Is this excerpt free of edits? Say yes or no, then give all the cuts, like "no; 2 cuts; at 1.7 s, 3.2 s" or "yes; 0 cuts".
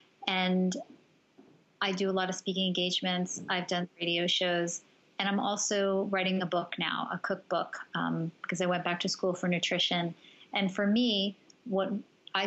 yes; 0 cuts